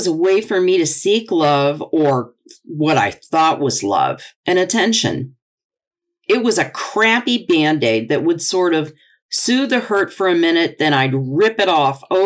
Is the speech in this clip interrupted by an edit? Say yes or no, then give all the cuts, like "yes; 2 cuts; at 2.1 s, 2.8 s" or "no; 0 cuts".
no; 0 cuts